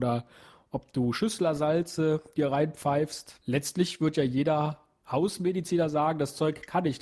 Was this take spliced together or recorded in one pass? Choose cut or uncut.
uncut